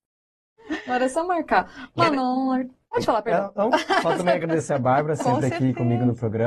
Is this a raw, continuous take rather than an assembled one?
yes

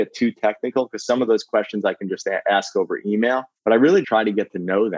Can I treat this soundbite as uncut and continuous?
no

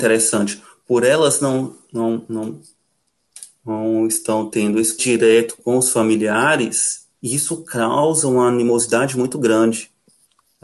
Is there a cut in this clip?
yes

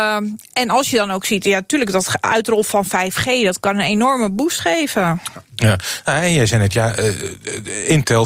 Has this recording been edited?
no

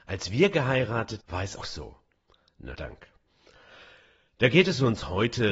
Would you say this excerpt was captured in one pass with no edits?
no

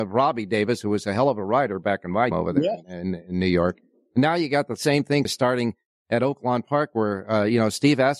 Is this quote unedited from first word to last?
no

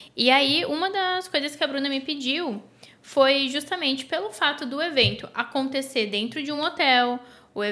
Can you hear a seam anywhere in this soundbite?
no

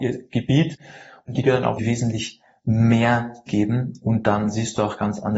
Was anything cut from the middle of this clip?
yes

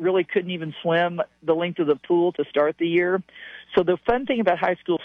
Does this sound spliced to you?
no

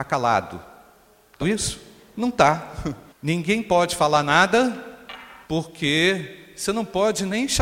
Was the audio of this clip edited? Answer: yes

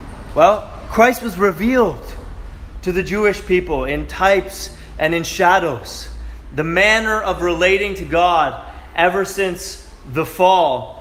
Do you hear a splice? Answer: no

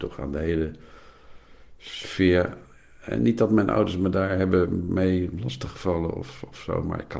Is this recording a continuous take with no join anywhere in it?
yes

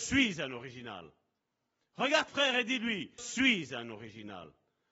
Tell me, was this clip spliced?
yes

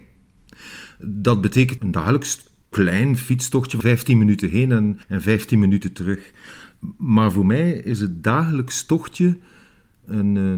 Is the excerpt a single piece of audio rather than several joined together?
no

